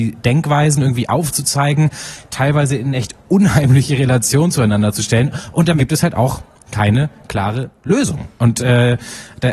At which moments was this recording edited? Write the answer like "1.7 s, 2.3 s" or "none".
5.8 s